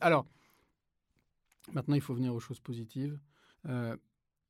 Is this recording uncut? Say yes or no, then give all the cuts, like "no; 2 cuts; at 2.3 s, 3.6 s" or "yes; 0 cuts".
no; 1 cut; at 3.5 s